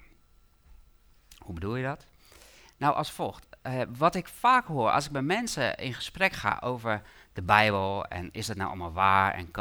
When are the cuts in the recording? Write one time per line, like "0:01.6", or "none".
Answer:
none